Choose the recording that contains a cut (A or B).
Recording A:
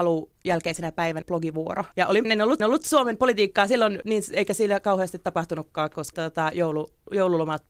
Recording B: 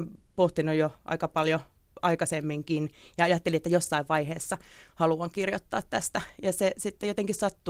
A